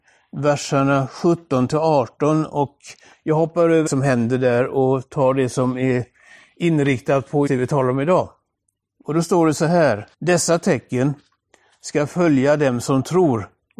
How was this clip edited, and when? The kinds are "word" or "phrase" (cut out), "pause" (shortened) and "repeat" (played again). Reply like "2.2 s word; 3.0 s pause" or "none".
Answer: 3.9 s phrase; 7.5 s word; 10.1 s pause